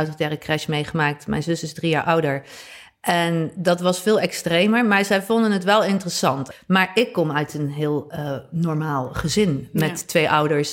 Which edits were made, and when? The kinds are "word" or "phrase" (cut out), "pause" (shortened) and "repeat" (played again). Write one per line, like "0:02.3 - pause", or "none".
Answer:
none